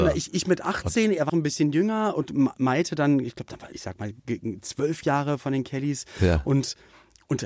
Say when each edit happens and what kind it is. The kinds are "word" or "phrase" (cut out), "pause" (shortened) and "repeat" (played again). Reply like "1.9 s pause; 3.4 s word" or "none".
1.3 s word; 3.7 s word